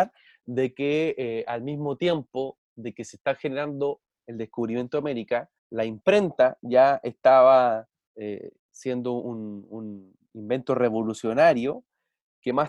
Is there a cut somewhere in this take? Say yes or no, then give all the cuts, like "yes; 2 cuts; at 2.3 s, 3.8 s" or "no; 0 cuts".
yes; 3 cuts; at 2.6 s, 5.6 s, 8.6 s